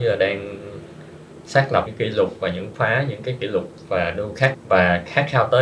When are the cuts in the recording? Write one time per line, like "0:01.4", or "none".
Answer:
0:01.9
0:04.5